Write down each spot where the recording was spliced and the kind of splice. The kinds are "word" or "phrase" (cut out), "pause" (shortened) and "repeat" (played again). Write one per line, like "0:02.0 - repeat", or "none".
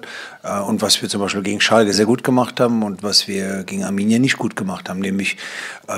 0:01.9 - word